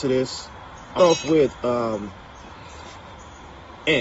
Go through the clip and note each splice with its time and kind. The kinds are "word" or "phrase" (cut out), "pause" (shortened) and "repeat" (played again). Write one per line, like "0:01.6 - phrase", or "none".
0:01.0 - phrase